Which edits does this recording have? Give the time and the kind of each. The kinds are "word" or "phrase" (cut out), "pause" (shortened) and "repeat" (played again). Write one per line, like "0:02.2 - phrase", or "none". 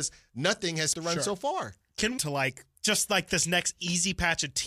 0:00.9 - word
0:02.2 - phrase
0:02.7 - pause